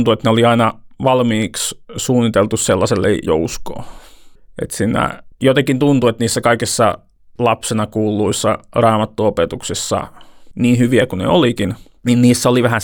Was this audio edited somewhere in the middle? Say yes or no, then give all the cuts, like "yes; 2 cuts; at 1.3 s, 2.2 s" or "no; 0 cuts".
yes; 2 cuts; at 3.3 s, 5.3 s